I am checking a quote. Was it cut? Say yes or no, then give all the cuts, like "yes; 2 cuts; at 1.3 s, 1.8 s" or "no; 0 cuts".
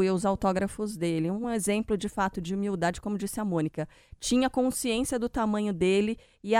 no; 0 cuts